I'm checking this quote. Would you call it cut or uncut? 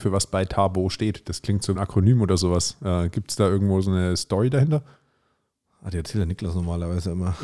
cut